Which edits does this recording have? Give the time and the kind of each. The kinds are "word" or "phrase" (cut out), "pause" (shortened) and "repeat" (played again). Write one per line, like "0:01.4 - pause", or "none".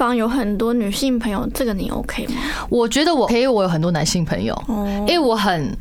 0:03.3 - word